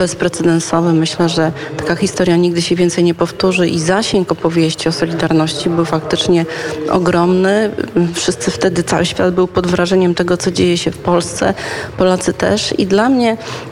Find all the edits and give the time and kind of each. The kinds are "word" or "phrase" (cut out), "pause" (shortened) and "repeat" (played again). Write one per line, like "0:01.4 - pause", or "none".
none